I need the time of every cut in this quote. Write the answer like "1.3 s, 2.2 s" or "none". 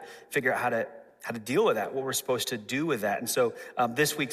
none